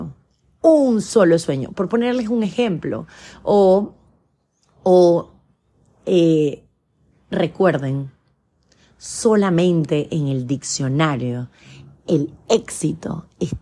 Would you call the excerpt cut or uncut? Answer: uncut